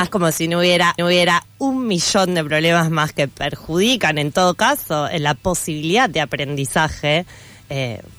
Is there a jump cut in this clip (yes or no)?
yes